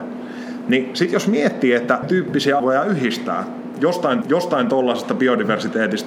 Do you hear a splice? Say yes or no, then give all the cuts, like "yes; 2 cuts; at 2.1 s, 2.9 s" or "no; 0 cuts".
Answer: yes; 3 cuts; at 2.0 s, 2.6 s, 4.2 s